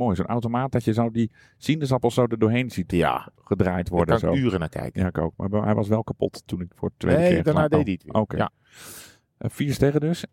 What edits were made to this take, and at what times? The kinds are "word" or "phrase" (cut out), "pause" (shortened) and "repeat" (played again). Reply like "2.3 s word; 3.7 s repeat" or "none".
none